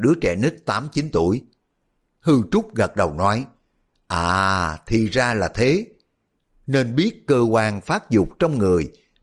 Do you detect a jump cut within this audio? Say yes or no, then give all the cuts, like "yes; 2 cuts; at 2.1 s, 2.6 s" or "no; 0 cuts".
no; 0 cuts